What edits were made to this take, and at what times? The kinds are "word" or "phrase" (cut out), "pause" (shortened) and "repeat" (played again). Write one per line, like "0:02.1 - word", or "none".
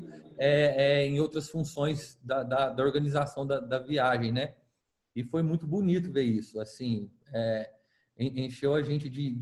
none